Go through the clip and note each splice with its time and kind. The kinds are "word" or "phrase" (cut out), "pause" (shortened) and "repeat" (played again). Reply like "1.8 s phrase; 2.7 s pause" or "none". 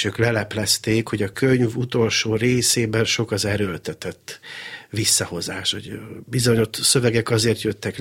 none

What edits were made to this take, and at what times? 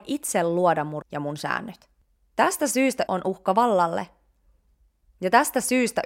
1.0 s word; 3.1 s phrase

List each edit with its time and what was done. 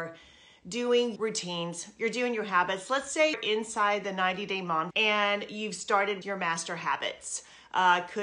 1.2 s word; 3.3 s word; 4.9 s word; 6.2 s word

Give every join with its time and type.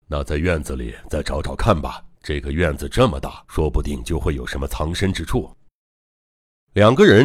2.1 s pause; 3.4 s pause

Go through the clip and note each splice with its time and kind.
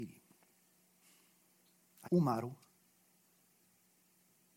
2.0 s word

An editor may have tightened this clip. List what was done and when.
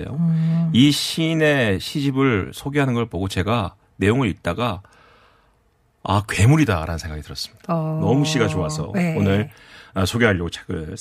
none

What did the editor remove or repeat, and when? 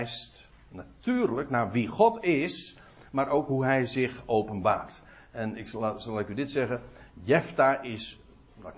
none

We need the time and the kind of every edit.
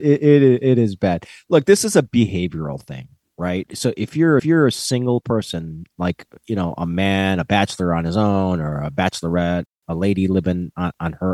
4.4 s repeat

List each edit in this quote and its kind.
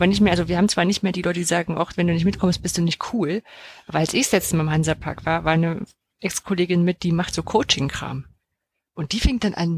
none

